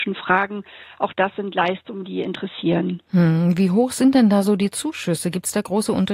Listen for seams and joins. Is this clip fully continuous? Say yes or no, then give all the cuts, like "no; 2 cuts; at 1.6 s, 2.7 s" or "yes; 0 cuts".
yes; 0 cuts